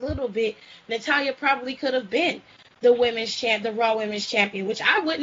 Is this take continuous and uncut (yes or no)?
yes